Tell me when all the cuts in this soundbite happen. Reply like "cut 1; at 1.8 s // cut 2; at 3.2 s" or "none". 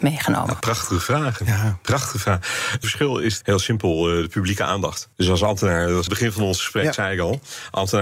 cut 1; at 2.8 s // cut 2; at 3.4 s // cut 3; at 5.1 s // cut 4; at 6.1 s